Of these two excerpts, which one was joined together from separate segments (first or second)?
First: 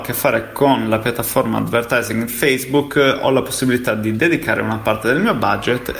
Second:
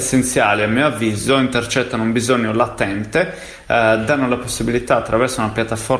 first